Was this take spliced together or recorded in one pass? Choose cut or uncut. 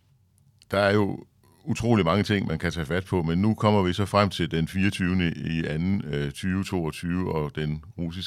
uncut